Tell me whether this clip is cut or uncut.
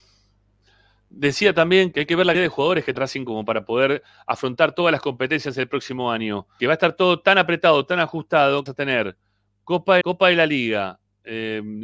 cut